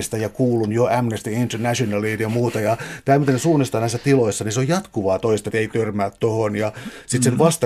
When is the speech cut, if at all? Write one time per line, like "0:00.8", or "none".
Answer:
0:05.5

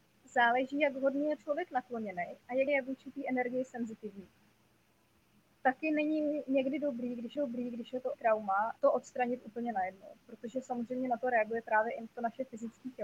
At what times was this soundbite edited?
0:01.4
0:02.7
0:07.4
0:08.1
0:08.8
0:10.2

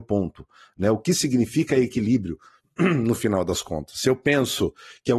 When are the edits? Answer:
none

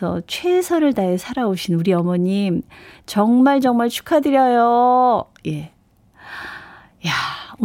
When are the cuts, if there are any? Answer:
none

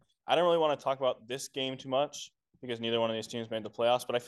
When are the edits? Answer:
none

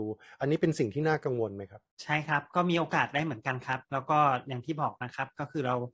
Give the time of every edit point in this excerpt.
0:01.9

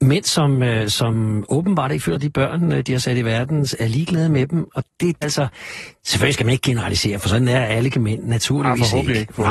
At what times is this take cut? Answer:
0:02.1
0:05.2
0:07.9

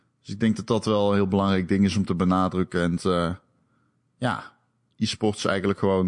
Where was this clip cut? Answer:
0:03.0

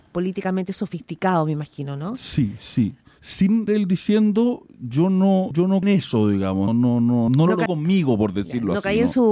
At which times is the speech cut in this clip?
0:03.7
0:05.5
0:05.8
0:06.7
0:07.3
0:07.7

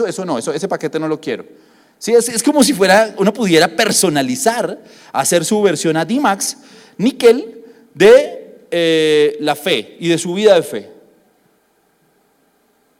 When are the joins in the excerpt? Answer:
none

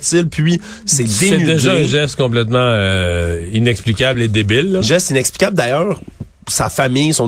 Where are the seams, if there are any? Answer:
none

